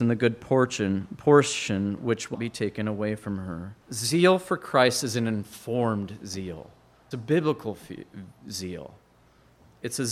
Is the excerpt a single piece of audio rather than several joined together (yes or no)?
no